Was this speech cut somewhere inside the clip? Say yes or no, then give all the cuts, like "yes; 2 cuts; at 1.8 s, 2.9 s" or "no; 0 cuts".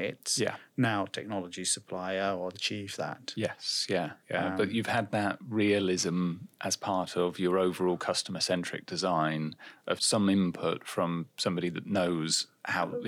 yes; 3 cuts; at 2.5 s, 4.2 s, 10.0 s